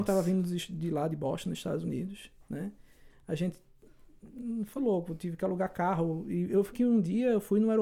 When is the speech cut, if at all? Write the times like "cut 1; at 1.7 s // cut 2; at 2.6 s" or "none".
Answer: cut 1; at 4.8 s // cut 2; at 6.7 s